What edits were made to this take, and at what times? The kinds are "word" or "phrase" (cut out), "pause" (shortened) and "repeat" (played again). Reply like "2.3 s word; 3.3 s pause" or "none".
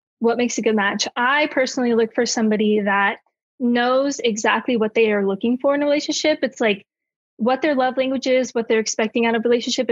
none